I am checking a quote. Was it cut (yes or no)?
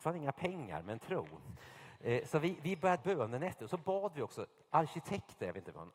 yes